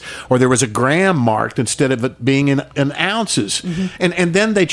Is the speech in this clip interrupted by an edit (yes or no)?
no